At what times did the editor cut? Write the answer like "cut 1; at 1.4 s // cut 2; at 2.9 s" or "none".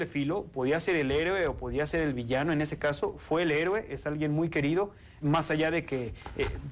cut 1; at 5.2 s

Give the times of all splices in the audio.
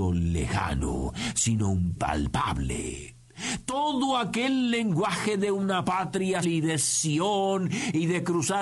cut 1; at 2.0 s // cut 2; at 6.4 s

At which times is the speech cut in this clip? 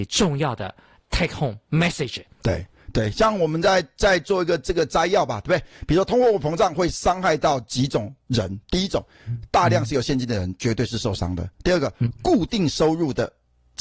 cut 1; at 2.3 s

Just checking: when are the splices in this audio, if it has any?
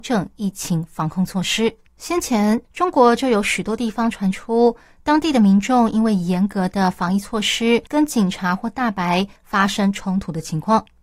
cut 1; at 1.9 s // cut 2; at 2.6 s // cut 3; at 7.9 s

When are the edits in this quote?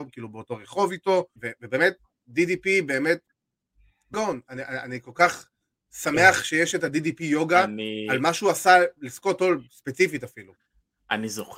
cut 1; at 1.4 s // cut 2; at 4.1 s

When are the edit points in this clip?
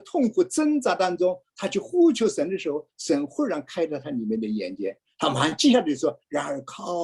none

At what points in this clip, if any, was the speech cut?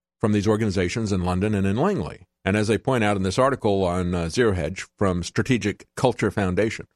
cut 1; at 2.4 s

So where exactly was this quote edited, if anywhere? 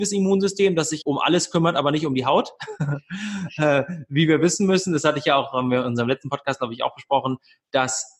cut 1; at 1.0 s

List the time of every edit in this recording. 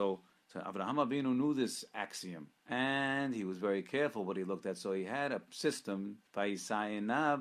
cut 1; at 2.6 s // cut 2; at 6.3 s

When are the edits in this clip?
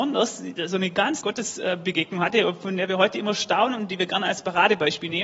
cut 1; at 1.2 s

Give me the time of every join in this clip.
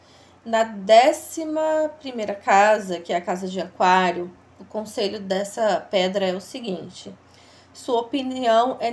none

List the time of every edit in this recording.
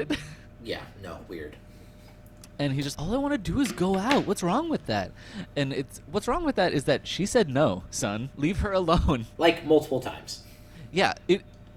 cut 1; at 2.9 s // cut 2; at 9.3 s

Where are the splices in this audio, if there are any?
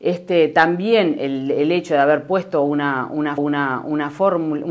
cut 1; at 3.4 s

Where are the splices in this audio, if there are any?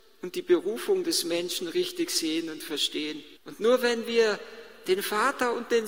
cut 1; at 3.4 s

